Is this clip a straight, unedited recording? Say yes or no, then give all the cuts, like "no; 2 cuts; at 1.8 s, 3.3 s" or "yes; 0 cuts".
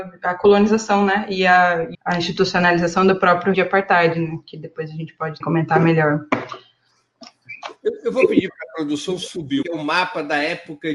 no; 4 cuts; at 1.9 s, 3.5 s, 5.4 s, 9.6 s